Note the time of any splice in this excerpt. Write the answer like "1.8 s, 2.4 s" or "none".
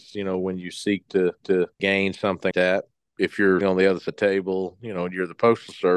1.4 s, 2.5 s, 3.6 s, 4.1 s